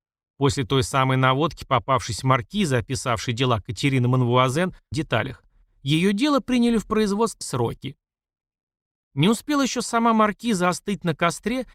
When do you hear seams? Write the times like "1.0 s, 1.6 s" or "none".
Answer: 4.9 s, 7.4 s